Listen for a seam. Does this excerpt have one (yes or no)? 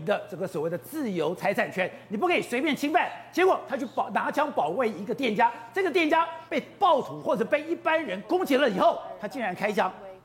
yes